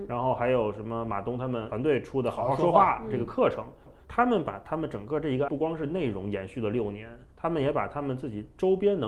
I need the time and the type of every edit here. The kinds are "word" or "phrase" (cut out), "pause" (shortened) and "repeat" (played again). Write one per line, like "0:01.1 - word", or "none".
0:03.9 - repeat
0:05.5 - word
0:07.3 - pause